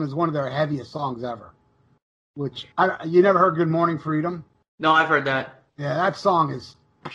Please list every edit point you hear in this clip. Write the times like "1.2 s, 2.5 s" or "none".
2.7 s, 4.6 s, 5.7 s